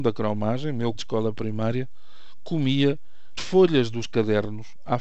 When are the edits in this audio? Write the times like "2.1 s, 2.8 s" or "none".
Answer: 0.9 s, 3.4 s